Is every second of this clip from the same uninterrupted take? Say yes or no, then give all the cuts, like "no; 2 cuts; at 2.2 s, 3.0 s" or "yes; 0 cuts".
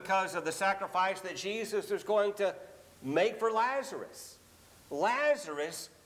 yes; 0 cuts